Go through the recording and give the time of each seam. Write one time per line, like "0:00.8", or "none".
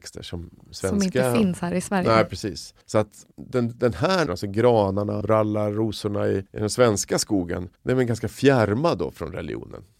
0:02.8
0:03.3
0:04.3
0:05.2
0:06.5
0:07.8